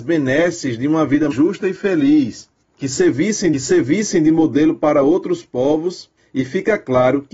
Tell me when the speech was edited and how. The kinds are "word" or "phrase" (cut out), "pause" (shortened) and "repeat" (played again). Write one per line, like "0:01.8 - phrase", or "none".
0:01.3 - word
0:03.5 - repeat